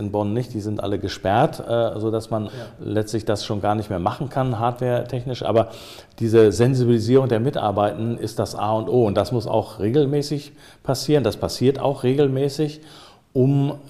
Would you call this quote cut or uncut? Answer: cut